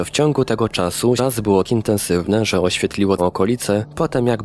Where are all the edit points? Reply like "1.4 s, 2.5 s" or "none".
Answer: 1.2 s, 1.6 s, 3.2 s